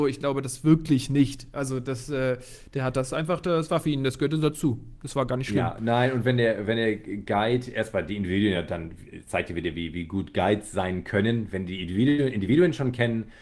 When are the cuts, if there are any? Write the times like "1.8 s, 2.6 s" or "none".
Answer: none